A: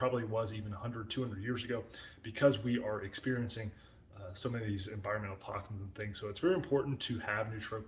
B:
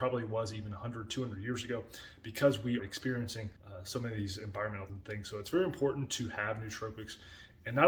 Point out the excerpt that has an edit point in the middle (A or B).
B